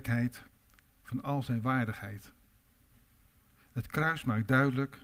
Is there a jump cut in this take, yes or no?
no